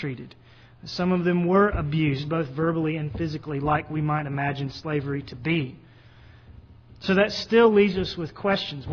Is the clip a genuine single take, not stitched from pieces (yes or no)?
yes